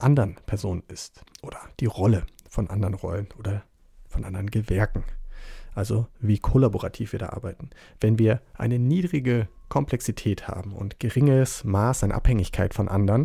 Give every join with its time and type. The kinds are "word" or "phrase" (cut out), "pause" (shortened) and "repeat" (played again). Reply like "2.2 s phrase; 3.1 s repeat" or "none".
none